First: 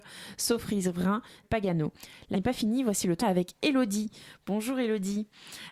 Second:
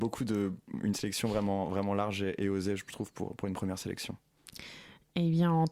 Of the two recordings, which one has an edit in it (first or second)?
first